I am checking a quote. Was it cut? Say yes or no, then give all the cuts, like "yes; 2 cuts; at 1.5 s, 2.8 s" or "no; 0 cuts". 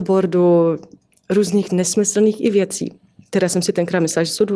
no; 0 cuts